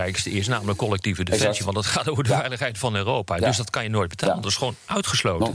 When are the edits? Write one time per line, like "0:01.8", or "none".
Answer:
none